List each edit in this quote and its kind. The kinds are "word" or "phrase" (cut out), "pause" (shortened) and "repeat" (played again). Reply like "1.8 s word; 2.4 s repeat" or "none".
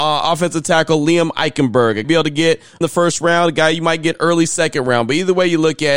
2.0 s phrase; 2.8 s phrase